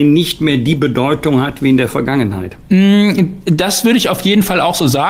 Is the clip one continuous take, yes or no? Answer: yes